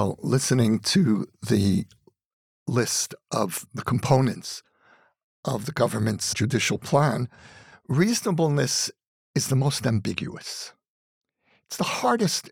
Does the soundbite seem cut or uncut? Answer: uncut